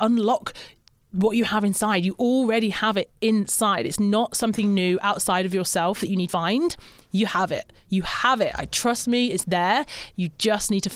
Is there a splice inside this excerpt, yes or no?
yes